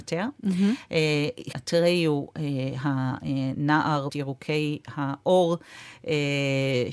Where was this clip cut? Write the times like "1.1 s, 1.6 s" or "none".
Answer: 1.5 s, 4.1 s